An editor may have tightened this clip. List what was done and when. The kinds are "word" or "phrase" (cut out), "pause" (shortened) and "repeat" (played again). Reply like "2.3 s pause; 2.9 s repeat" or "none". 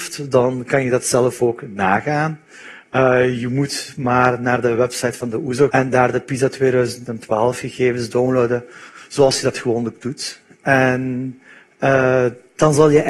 5.7 s word